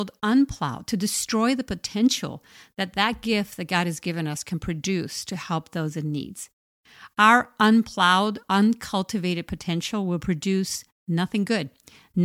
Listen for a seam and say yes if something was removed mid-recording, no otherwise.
no